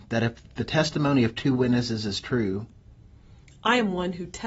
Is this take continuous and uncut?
yes; 0 cuts

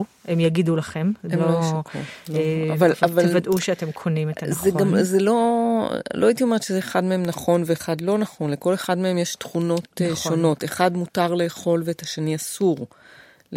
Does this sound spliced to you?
no; 0 cuts

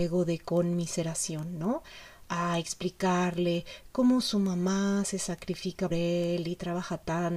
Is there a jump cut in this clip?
yes; 1 cut; at 5.9 s

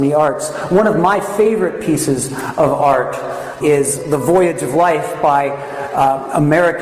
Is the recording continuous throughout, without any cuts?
no; 1 cut; at 3.6 s

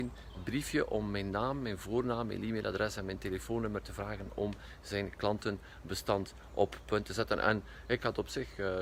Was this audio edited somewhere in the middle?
no; 0 cuts

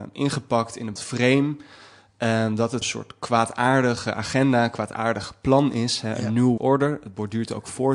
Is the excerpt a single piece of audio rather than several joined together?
no; 3 cuts; at 1.0 s, 2.8 s, 6.6 s

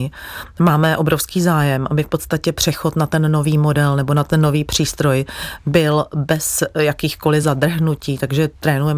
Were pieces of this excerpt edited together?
no; 0 cuts

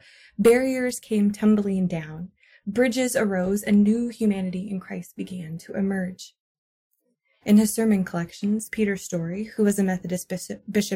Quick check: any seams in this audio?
no; 0 cuts

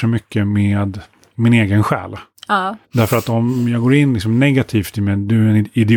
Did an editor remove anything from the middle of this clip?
yes; 1 cut; at 2.8 s

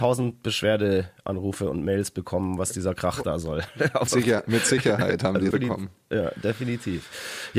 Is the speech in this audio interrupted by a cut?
yes; 2 cuts; at 4.1 s, 5.5 s

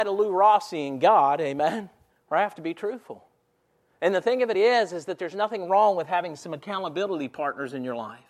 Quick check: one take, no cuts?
yes; 0 cuts

